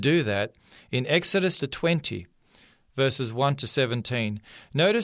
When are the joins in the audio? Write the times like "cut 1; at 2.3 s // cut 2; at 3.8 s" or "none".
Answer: cut 1; at 1.6 s